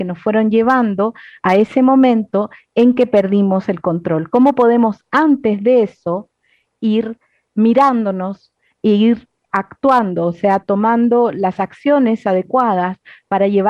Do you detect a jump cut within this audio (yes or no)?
yes